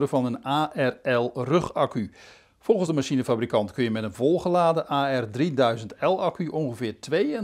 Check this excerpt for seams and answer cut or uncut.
uncut